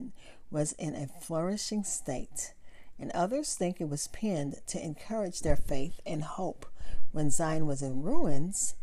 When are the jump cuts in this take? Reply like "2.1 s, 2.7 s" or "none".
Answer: none